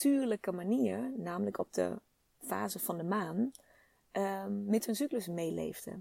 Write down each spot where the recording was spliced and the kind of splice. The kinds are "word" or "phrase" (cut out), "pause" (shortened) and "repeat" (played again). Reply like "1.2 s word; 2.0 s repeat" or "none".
none